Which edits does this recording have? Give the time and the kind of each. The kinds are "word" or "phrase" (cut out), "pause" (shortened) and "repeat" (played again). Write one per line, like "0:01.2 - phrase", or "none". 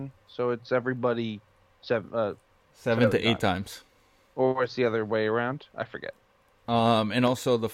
none